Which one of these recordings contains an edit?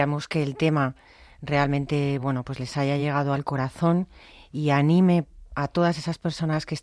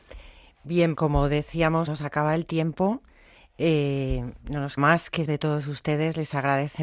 second; 4 cuts; at 1.0 s, 1.9 s, 4.8 s, 5.3 s

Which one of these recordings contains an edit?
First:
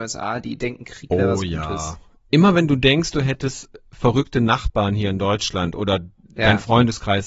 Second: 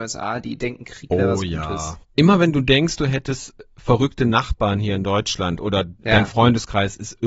second; 2 cuts; at 2.0 s, 6.0 s

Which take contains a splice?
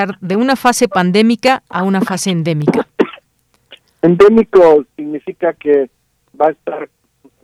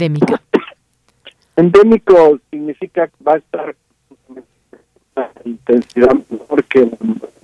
second; 2 cuts; at 3.1 s, 5.1 s

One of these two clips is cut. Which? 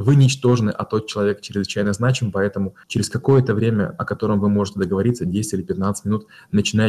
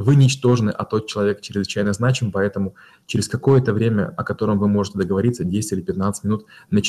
first; 1 cut; at 2.8 s

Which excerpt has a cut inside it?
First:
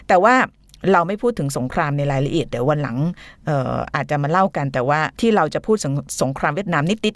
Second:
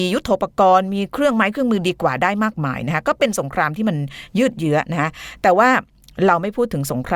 first; 1 cut; at 5.1 s

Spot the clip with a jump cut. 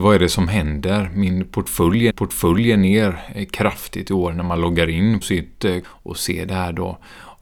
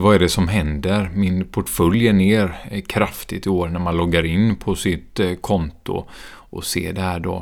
first; 3 cuts; at 2.1 s, 5.2 s, 5.8 s

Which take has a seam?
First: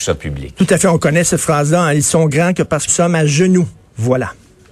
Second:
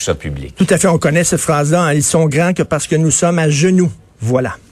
first; 1 cut; at 2.9 s

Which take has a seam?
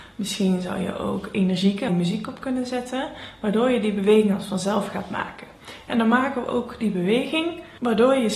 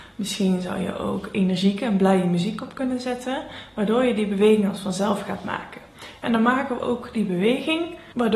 first; 1 cut; at 1.9 s

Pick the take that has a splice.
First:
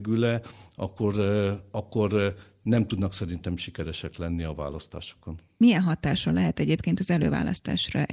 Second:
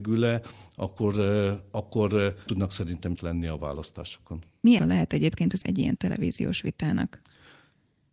second; 5 cuts; at 2.5 s, 3.2 s, 4.8 s, 5.6 s, 6.0 s

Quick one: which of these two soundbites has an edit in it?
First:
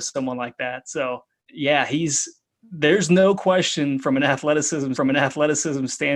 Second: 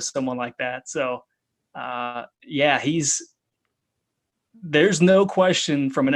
first; 3 cuts; at 1.4 s, 2.5 s, 4.9 s

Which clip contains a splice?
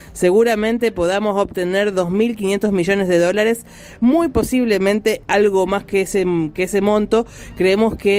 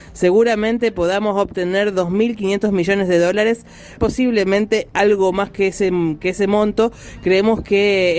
second; 1 cut; at 4.0 s

